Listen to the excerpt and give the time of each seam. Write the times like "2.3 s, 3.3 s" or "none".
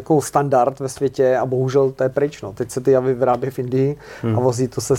none